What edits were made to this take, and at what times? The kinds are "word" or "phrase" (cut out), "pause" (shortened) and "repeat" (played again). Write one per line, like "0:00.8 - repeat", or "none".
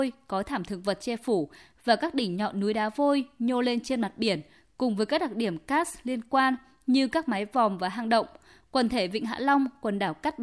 none